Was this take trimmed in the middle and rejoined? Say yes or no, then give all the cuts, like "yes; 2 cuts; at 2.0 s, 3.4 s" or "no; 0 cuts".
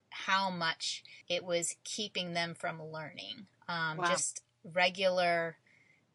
yes; 2 cuts; at 1.2 s, 3.5 s